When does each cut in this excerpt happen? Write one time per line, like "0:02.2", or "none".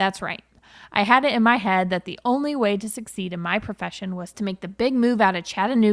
none